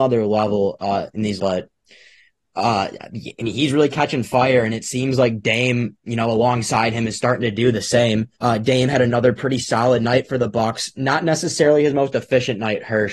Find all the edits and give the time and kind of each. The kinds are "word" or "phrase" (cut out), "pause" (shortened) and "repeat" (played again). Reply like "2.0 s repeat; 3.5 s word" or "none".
1.4 s phrase; 8.3 s pause